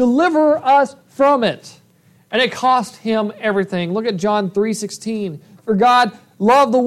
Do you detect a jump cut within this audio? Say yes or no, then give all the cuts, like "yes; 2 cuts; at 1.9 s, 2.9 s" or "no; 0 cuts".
no; 0 cuts